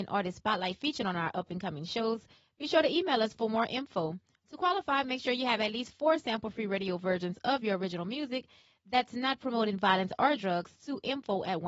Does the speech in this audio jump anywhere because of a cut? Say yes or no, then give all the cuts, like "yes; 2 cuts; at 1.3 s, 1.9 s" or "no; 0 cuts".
no; 0 cuts